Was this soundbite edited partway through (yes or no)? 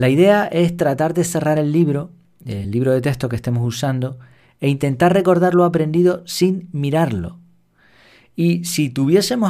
no